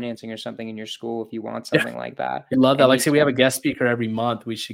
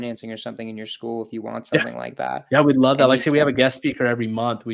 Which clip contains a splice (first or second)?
first